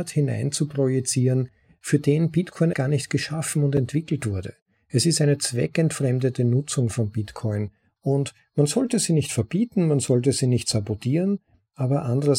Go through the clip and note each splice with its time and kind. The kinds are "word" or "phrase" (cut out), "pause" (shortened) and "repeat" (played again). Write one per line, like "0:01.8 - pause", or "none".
0:02.7 - word